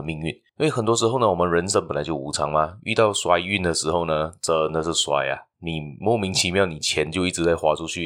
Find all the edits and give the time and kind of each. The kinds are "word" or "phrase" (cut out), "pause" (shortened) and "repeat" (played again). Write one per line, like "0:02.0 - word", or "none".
0:05.5 - pause